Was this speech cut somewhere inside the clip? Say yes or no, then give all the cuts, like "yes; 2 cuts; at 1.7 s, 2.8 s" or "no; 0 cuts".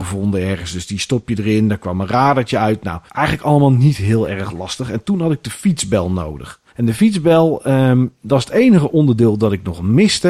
yes; 2 cuts; at 3.1 s, 6.7 s